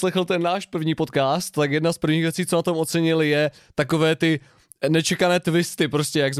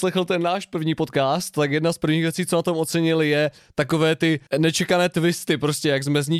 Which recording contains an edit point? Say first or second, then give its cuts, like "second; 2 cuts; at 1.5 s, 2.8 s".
second; 1 cut; at 4.5 s